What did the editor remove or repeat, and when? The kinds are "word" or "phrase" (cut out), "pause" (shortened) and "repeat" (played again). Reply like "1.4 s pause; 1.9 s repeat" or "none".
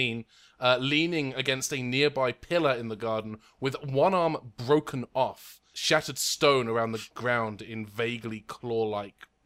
none